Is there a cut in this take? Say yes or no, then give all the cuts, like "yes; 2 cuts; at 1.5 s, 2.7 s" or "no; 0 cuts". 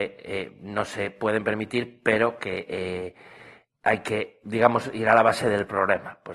no; 0 cuts